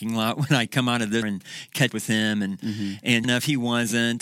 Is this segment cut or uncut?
cut